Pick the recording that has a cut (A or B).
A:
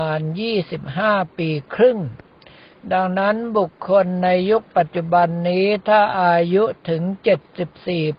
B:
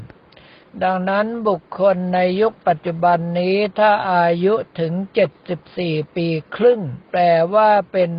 B